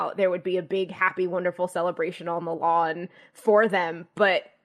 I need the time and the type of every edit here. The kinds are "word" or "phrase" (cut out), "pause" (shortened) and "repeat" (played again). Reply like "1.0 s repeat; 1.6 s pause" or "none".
none